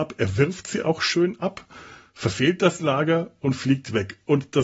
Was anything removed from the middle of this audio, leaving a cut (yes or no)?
no